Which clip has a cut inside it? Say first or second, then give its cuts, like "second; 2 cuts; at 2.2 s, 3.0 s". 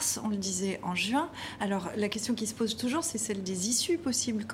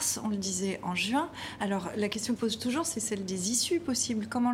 second; 1 cut; at 2.4 s